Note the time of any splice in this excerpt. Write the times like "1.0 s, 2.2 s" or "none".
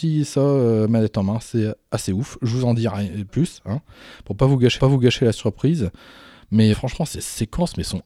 3.3 s, 4.8 s, 6.7 s